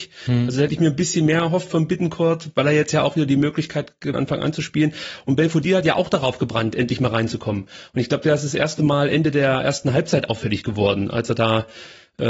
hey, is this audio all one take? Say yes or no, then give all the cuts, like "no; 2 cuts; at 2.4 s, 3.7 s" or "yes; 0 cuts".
no; 1 cut; at 4.1 s